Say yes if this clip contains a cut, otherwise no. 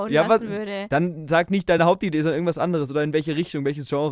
no